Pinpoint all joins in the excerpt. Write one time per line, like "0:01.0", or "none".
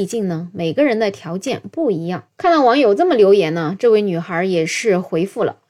0:02.3